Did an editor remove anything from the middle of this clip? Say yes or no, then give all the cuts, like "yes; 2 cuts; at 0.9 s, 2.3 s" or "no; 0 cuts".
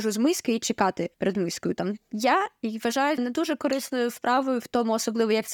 yes; 2 cuts; at 1.1 s, 3.2 s